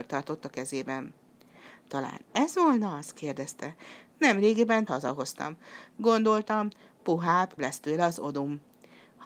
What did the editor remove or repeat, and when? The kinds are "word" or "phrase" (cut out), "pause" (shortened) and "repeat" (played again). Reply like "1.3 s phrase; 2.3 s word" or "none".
4.9 s phrase; 7.6 s word